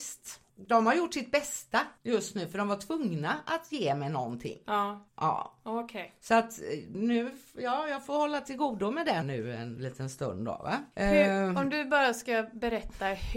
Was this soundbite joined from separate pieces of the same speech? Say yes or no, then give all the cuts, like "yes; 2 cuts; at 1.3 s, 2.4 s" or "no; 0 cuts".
yes; 3 cuts; at 2.0 s, 5.1 s, 9.2 s